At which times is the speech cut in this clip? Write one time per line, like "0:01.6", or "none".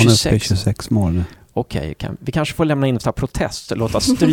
none